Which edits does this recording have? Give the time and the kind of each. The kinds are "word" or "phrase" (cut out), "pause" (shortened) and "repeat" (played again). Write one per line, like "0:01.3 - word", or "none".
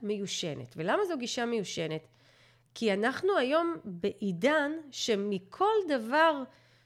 none